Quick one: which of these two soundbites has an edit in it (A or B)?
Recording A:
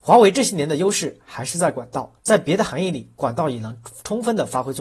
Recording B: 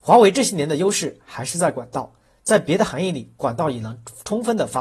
A